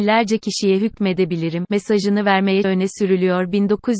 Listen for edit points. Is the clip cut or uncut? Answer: cut